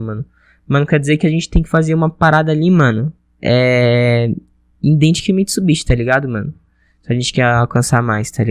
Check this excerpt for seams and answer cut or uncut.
uncut